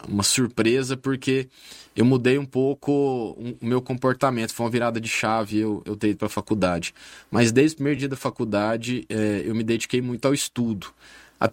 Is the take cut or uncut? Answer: uncut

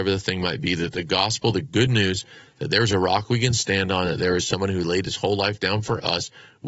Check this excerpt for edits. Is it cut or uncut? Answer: uncut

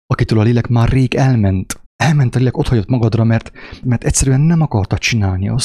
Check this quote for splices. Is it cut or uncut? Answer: cut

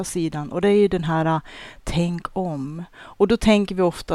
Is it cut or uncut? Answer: uncut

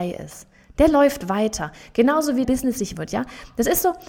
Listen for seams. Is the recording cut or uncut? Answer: cut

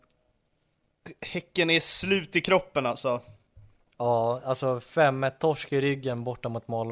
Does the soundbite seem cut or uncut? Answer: uncut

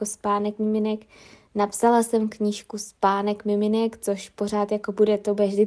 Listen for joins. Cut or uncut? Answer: uncut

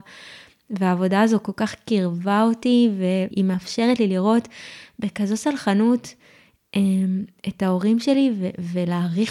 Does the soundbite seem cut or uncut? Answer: cut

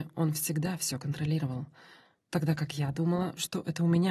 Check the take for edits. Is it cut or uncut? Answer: uncut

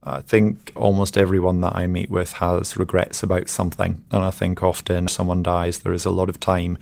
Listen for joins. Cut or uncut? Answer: cut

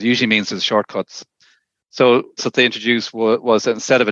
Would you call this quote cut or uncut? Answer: cut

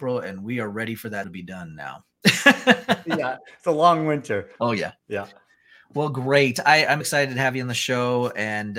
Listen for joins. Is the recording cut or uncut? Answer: cut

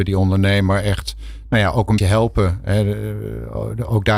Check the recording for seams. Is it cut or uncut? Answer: cut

